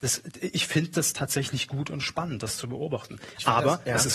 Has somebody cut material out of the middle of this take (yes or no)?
no